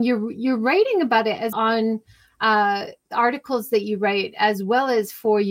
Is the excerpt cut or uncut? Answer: cut